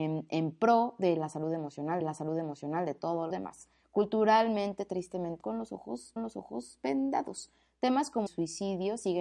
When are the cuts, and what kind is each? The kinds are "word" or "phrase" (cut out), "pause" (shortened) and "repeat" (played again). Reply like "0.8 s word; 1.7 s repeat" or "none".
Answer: 2.0 s repeat; 3.3 s word; 5.4 s word; 6.2 s repeat; 8.3 s word